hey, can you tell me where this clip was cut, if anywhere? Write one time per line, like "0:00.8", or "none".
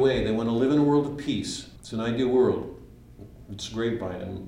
0:01.8